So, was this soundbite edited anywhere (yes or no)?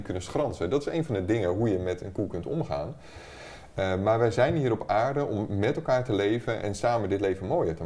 yes